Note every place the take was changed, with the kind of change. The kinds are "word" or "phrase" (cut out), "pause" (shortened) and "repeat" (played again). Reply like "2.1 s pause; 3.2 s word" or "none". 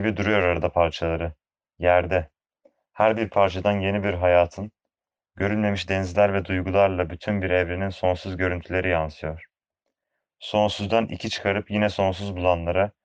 none